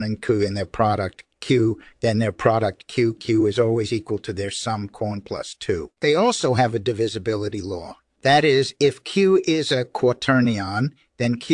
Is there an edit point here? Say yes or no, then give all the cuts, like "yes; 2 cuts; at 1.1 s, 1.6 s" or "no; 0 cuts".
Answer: yes; 1 cut; at 6.0 s